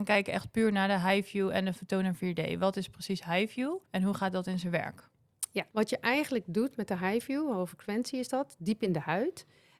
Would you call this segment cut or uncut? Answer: cut